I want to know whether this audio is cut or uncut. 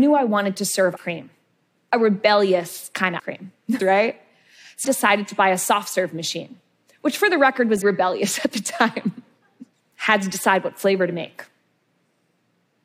cut